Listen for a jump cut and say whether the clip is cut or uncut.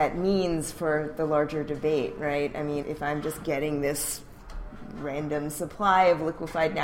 cut